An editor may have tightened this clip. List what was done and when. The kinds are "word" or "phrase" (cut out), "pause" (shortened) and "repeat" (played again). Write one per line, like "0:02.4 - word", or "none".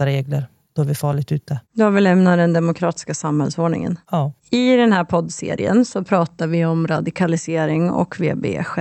none